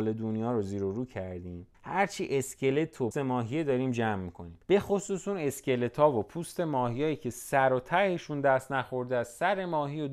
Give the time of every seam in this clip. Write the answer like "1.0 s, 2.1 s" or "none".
1.7 s, 3.1 s, 4.6 s